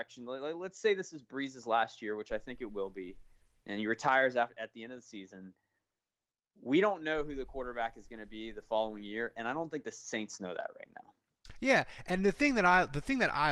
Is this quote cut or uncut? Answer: uncut